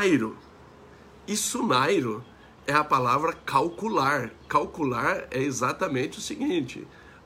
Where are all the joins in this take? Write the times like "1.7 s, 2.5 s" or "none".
none